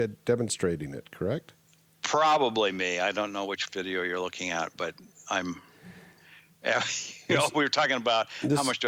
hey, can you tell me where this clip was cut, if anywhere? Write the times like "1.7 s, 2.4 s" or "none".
none